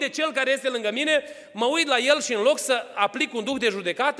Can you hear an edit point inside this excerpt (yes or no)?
no